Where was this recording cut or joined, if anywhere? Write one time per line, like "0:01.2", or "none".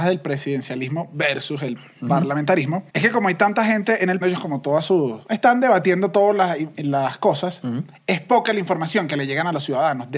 0:02.9
0:04.2
0:05.2